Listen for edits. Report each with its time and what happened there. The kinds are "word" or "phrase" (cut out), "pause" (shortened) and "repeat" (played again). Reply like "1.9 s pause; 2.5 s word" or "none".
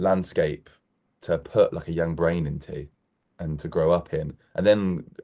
none